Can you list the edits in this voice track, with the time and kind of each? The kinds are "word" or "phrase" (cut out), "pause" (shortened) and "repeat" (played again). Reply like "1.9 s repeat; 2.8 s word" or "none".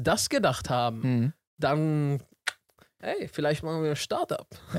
none